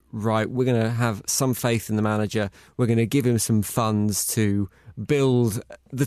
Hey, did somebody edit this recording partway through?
no; 0 cuts

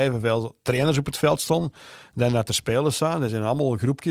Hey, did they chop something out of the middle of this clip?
no; 0 cuts

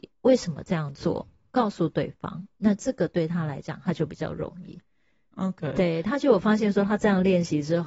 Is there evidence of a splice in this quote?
yes; 1 cut; at 2.5 s

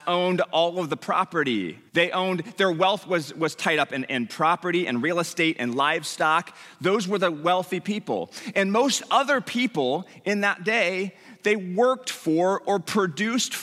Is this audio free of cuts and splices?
no; 1 cut; at 1.9 s

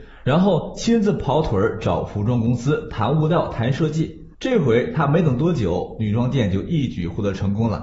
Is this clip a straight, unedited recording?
no; 1 cut; at 4.3 s

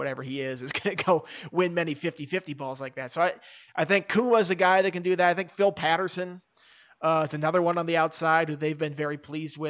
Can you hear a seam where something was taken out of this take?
no; 0 cuts

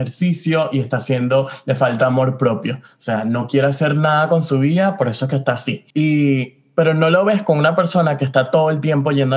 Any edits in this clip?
yes; 1 cut; at 5.9 s

